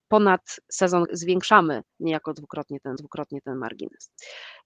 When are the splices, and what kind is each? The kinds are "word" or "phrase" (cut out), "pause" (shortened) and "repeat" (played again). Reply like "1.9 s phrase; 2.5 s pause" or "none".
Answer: 1.0 s phrase; 3.0 s repeat